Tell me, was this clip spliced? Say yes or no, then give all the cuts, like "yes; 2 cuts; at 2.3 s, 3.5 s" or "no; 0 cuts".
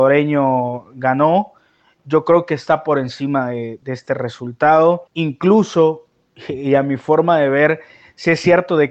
yes; 1 cut; at 5.1 s